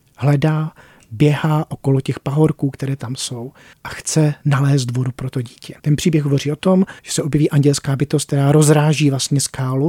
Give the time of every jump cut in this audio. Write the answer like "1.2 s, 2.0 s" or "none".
3.7 s, 5.8 s, 7.0 s